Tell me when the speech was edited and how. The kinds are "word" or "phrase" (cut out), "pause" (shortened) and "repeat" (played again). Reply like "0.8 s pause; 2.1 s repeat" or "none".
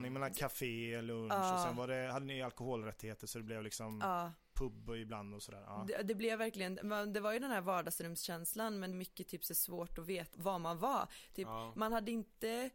8.9 s phrase; 10.3 s word